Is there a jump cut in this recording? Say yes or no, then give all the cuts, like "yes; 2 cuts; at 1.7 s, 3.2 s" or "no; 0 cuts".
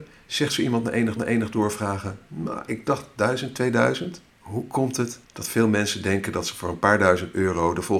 yes; 3 cuts; at 1.2 s, 4.3 s, 5.2 s